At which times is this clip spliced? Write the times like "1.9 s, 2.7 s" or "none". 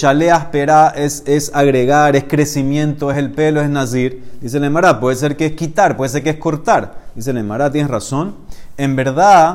none